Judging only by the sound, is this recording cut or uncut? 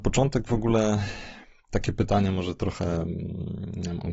uncut